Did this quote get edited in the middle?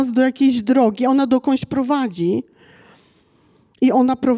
no; 0 cuts

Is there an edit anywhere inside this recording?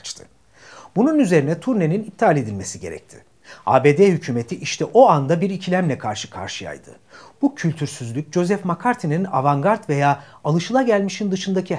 no; 0 cuts

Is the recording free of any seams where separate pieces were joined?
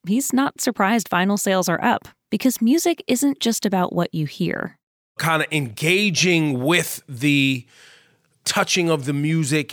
yes; 0 cuts

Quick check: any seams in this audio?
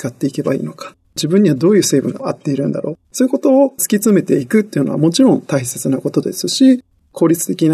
yes; 1 cut; at 3.0 s

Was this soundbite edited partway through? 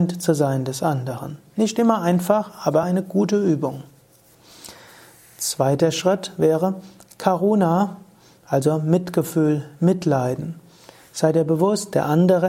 no; 0 cuts

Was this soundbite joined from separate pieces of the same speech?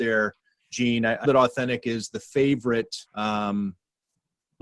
yes; 2 cuts; at 1.2 s, 3.1 s

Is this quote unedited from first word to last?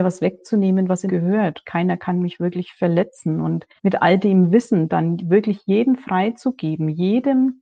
no; 2 cuts; at 1.1 s, 3.8 s

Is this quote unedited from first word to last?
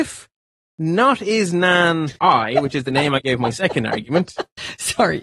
no; 1 cut; at 2.2 s

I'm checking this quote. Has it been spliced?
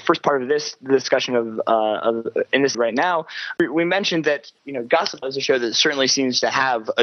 yes; 4 cuts; at 2.7 s, 3.6 s, 4.6 s, 5.2 s

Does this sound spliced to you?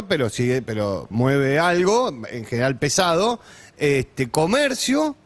yes; 1 cut; at 1.1 s

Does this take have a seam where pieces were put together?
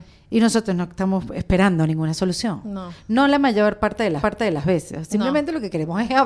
yes; 1 cut; at 4.2 s

